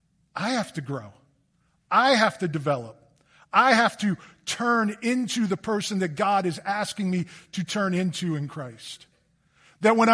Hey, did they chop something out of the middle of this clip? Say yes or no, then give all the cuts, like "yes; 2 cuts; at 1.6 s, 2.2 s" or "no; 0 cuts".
no; 0 cuts